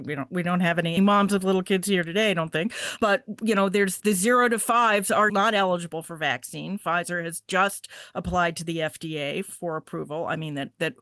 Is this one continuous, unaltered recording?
no; 4 cuts; at 1.0 s, 3.0 s, 4.0 s, 5.3 s

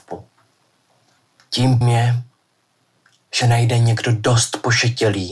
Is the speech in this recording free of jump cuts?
no; 2 cuts; at 1.8 s, 3.4 s

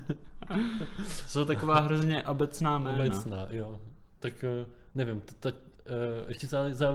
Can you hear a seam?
no; 0 cuts

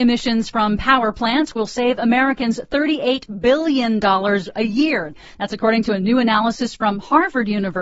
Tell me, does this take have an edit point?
no; 0 cuts

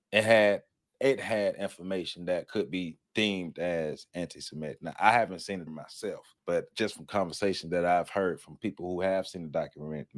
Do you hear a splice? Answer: yes; 3 cuts; at 3.0 s, 5.7 s, 6.4 s

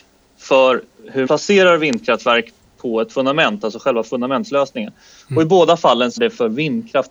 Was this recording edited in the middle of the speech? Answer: yes; 2 cuts; at 1.3 s, 6.2 s

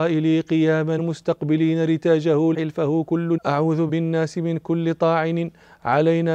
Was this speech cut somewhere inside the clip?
yes; 4 cuts; at 1.0 s, 2.5 s, 3.4 s, 3.9 s

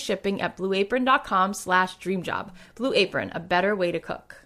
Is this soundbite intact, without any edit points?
yes; 0 cuts

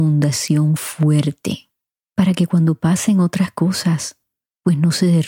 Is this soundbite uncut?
yes; 0 cuts

